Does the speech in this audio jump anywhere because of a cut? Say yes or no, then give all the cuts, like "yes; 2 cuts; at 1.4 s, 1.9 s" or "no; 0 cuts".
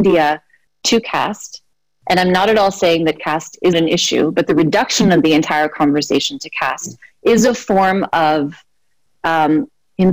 yes; 1 cut; at 3.7 s